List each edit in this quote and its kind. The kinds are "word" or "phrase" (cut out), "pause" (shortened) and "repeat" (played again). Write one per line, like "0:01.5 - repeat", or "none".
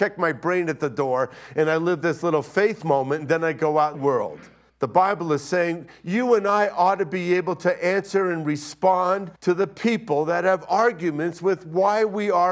0:03.9 - phrase
0:04.7 - pause
0:09.4 - pause